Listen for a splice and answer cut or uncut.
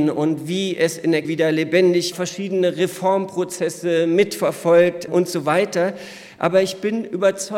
cut